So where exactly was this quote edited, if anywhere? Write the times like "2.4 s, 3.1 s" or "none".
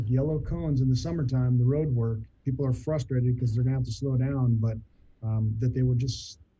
none